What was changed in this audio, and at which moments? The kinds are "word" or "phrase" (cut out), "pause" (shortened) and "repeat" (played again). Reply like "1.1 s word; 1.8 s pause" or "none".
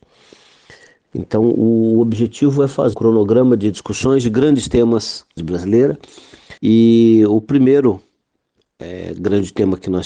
2.9 s word; 5.4 s phrase; 6.6 s pause